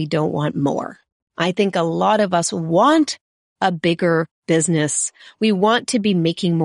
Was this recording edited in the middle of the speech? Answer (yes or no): no